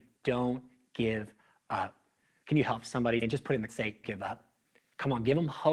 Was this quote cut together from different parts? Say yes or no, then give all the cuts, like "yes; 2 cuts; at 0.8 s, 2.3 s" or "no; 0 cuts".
yes; 3 cuts; at 3.2 s, 3.7 s, 4.0 s